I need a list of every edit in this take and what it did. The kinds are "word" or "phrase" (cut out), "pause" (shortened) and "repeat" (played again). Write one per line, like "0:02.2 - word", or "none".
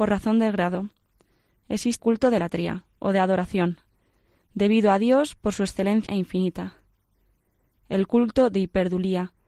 0:02.0 - word
0:06.1 - word